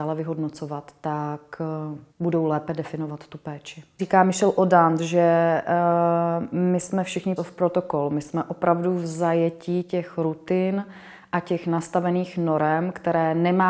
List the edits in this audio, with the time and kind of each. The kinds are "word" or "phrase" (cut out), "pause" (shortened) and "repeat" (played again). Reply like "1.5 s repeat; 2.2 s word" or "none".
2.1 s pause; 4.0 s word; 7.4 s word